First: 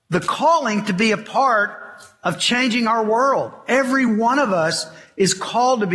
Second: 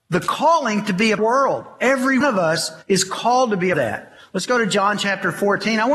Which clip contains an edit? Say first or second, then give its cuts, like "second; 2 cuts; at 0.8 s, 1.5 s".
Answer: second; 4 cuts; at 1.2 s, 2.2 s, 2.8 s, 3.7 s